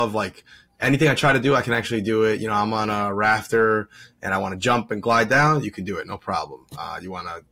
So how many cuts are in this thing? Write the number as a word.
zero